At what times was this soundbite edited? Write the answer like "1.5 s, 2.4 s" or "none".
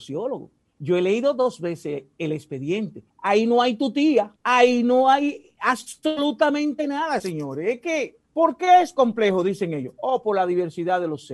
3.1 s, 4.4 s, 8.2 s